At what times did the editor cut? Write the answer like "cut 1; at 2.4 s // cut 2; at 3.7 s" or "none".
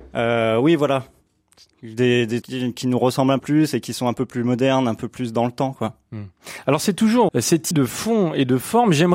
cut 1; at 2.4 s // cut 2; at 3.4 s // cut 3; at 7.3 s // cut 4; at 7.7 s